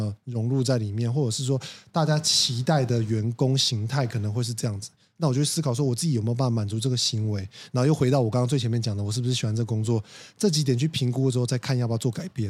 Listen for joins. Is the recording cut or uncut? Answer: uncut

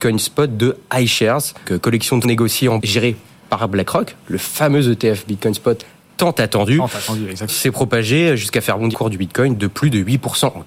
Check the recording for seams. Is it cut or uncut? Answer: cut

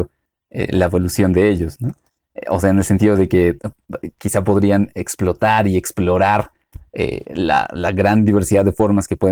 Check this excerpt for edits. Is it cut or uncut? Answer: uncut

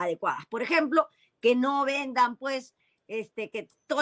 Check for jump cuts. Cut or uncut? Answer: uncut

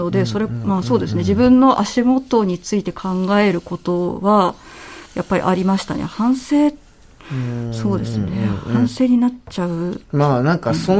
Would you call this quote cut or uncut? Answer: cut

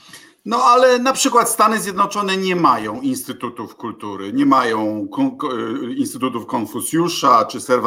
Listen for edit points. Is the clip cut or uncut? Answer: uncut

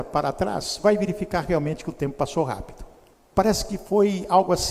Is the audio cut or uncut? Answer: cut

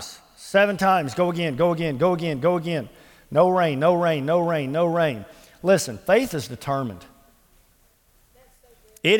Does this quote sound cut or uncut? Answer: uncut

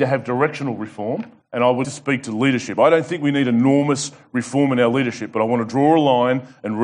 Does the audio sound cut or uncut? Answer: cut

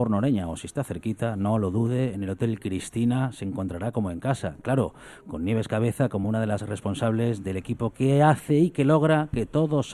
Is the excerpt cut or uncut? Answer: uncut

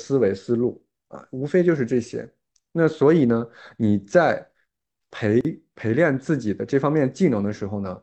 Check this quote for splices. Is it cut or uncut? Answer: uncut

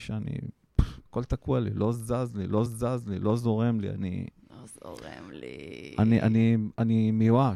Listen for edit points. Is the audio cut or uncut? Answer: cut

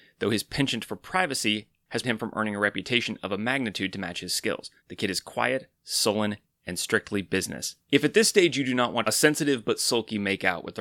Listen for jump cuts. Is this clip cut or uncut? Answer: cut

